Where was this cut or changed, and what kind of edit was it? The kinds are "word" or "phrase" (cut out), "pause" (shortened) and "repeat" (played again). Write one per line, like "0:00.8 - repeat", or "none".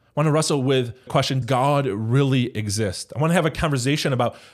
0:01.1 - word
0:01.4 - word